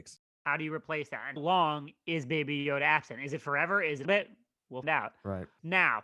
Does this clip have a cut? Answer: yes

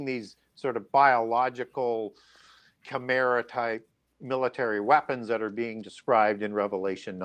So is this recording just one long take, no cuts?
yes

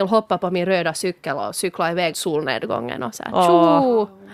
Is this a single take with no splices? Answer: no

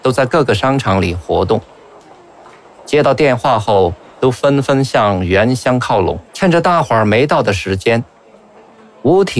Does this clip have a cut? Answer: yes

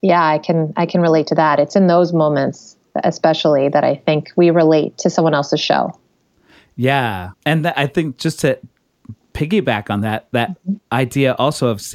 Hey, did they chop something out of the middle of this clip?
yes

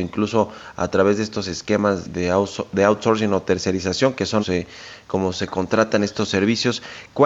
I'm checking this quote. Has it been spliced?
yes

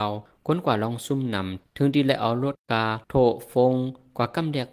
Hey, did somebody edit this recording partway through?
yes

